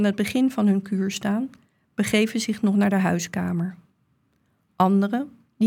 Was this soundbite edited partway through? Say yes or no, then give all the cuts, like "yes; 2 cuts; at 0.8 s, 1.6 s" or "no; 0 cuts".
no; 0 cuts